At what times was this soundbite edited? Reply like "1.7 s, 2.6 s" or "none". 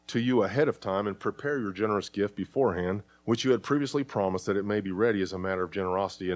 3.1 s